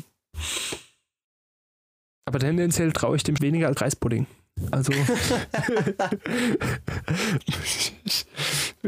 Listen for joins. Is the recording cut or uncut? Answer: cut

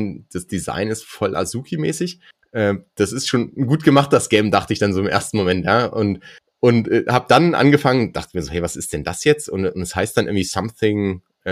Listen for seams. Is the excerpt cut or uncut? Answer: uncut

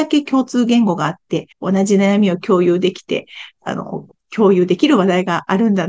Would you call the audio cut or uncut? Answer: cut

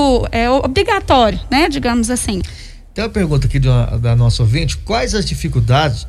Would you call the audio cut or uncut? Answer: uncut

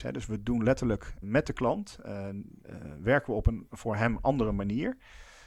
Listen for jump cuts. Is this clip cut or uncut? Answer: cut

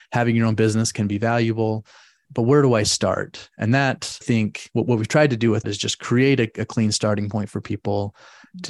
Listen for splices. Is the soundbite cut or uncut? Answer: cut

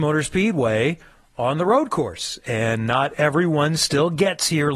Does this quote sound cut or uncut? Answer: uncut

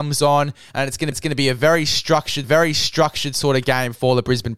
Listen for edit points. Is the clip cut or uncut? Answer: cut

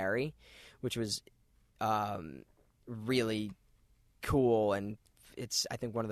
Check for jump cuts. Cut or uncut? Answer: uncut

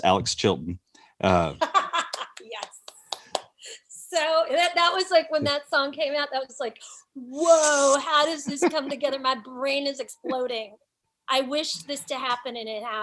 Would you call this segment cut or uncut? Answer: uncut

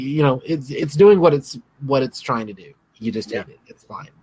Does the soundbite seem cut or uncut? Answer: uncut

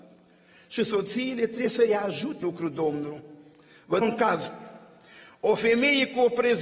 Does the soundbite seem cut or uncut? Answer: cut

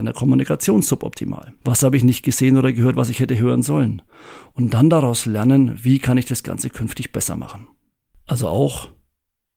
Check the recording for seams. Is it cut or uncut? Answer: cut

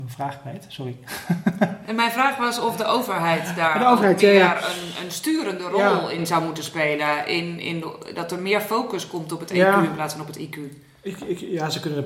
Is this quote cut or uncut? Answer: uncut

